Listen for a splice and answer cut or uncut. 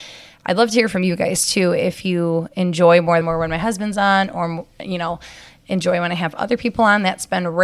cut